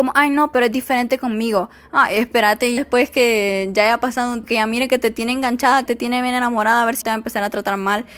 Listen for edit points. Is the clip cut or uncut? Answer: cut